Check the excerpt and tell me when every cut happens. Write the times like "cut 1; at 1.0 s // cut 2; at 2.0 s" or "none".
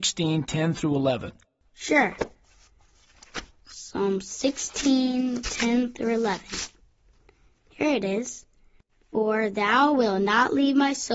cut 1; at 5.4 s